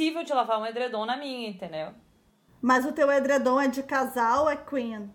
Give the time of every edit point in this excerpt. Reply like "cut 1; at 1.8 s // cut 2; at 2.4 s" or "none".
none